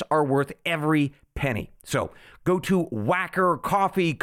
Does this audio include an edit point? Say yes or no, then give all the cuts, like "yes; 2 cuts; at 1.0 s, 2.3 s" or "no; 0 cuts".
no; 0 cuts